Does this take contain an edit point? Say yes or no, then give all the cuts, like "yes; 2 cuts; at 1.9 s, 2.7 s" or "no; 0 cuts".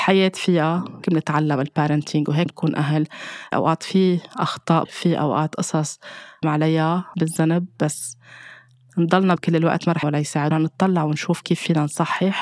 yes; 9 cuts; at 1.0 s, 2.5 s, 3.5 s, 4.8 s, 6.4 s, 7.1 s, 9.4 s, 10.0 s, 10.5 s